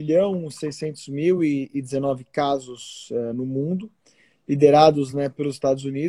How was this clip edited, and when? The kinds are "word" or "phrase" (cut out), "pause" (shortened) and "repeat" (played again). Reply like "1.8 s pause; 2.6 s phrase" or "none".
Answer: none

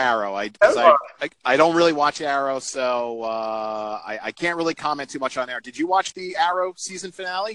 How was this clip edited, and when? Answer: none

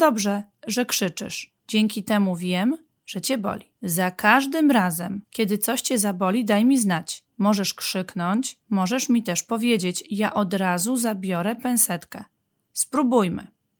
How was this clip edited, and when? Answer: 1.6 s pause; 2.9 s pause; 3.8 s pause; 5.2 s pause; 7.3 s pause; 8.6 s pause

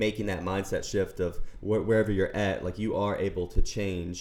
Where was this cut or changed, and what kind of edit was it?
none

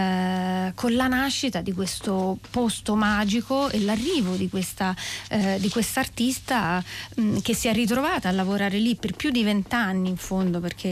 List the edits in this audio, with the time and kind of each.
9.0 s word

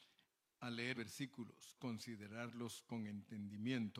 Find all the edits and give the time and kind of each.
0.9 s word; 1.8 s word

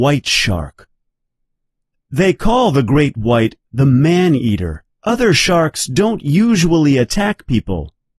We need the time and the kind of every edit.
4.9 s pause

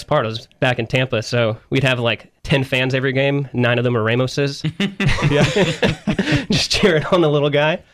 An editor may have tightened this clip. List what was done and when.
2.4 s pause

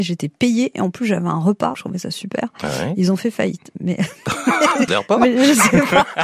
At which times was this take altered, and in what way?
1.7 s word; 4.9 s word

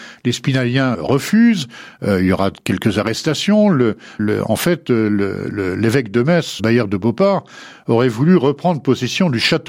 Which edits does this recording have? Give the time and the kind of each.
0.9 s word; 4.2 s word; 6.6 s word

